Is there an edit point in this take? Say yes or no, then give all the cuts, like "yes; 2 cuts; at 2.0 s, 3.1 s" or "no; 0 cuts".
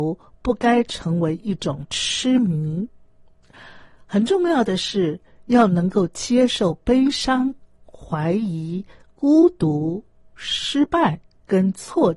no; 0 cuts